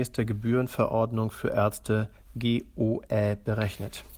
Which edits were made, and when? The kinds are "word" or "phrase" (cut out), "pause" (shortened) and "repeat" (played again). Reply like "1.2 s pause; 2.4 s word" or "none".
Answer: none